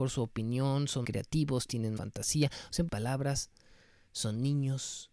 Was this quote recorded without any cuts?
no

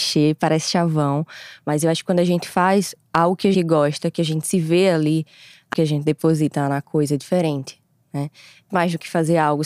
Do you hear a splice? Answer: yes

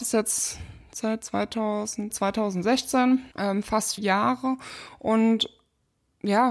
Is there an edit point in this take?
yes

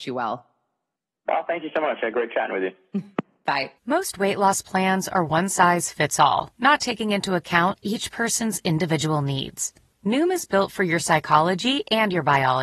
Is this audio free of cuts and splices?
no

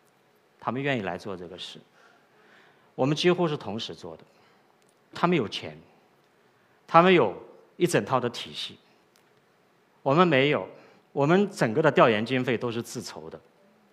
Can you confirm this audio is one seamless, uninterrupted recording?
no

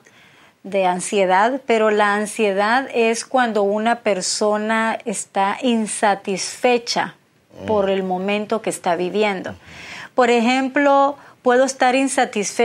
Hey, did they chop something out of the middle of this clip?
no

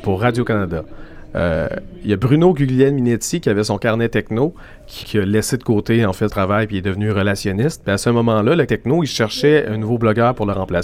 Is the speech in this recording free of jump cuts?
no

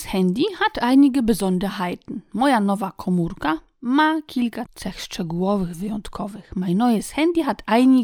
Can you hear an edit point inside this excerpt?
yes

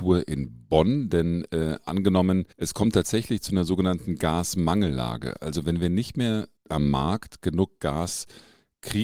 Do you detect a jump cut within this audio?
yes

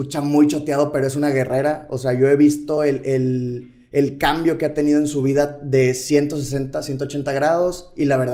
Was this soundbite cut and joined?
no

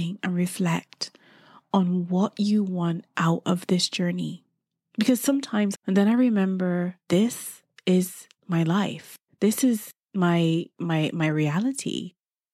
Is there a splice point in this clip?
yes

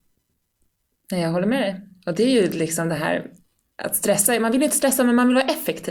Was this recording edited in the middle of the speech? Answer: no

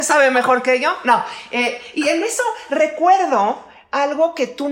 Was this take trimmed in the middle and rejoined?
no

